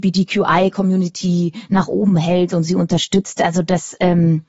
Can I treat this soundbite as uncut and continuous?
yes; 0 cuts

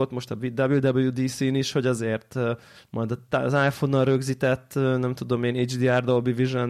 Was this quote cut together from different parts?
no; 0 cuts

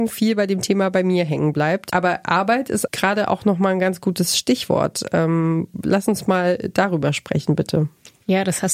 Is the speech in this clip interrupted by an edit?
yes; 1 cut; at 2.9 s

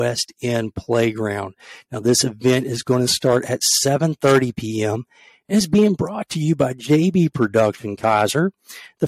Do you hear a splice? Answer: no; 0 cuts

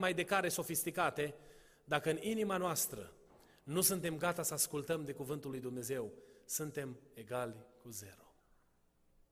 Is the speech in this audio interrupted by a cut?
no; 0 cuts

